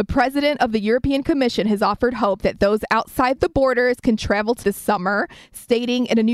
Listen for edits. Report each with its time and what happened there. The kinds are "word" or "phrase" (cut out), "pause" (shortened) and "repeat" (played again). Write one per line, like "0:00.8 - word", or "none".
0:04.6 - word